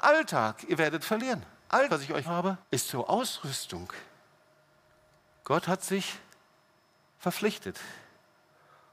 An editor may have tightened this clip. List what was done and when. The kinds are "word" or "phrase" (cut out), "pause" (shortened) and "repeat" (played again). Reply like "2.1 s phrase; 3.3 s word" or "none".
1.0 s word; 1.9 s word; 2.2 s word; 2.6 s pause; 4.9 s pause

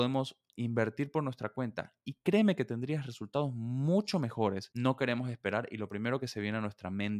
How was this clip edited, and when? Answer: none

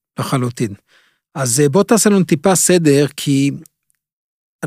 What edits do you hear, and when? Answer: none

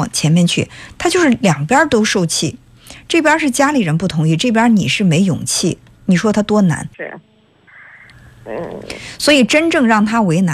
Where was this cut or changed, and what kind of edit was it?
6.9 s pause

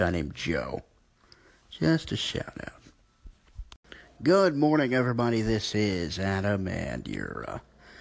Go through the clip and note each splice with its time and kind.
none

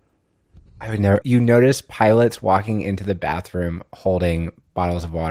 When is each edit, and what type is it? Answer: 1.2 s phrase

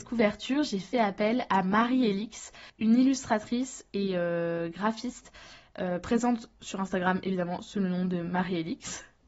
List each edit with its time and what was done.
2.7 s pause

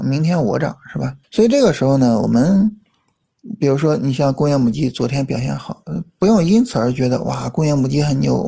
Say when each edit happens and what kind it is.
1.2 s pause

